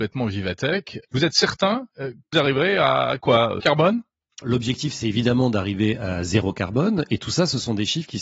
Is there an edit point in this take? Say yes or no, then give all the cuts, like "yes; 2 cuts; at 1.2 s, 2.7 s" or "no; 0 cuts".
yes; 4 cuts; at 1.9 s, 2.3 s, 3.6 s, 4.4 s